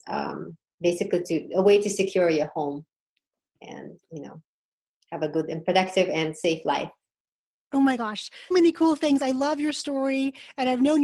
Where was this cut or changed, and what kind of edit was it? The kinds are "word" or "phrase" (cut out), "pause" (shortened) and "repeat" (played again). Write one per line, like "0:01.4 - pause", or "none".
0:08.5 - word